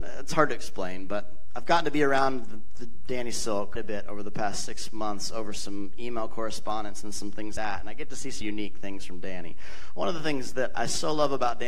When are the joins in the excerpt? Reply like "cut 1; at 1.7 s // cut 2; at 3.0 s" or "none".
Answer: cut 1; at 3.8 s // cut 2; at 7.6 s // cut 3; at 8.4 s